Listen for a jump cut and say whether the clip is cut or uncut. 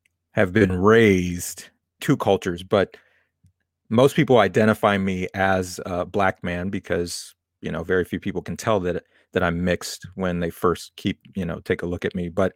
cut